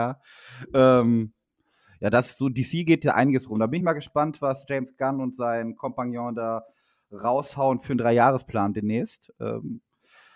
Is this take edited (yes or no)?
no